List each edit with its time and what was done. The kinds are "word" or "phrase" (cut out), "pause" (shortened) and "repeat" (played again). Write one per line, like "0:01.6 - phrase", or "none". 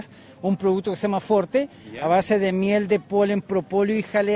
none